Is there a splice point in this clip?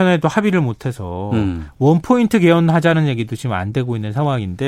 no; 0 cuts

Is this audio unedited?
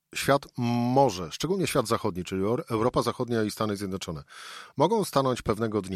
yes; 0 cuts

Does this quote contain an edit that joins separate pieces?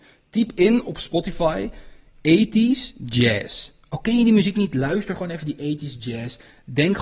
no; 0 cuts

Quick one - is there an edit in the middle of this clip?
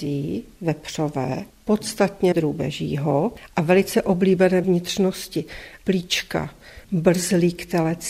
yes; 2 cuts; at 2.3 s, 4.6 s

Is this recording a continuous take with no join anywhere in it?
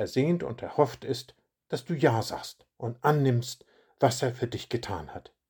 yes; 0 cuts

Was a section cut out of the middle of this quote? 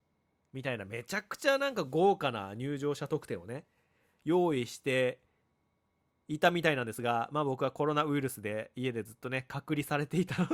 no; 0 cuts

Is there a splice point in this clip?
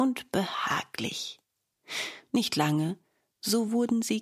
no; 0 cuts

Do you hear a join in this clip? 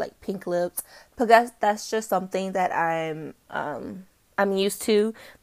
no; 0 cuts

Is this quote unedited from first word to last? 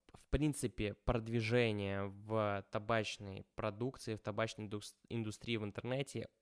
yes; 0 cuts

